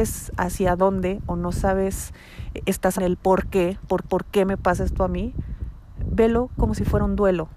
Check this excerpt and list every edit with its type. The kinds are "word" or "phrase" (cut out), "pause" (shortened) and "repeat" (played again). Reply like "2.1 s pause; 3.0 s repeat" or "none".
3.0 s word; 4.0 s repeat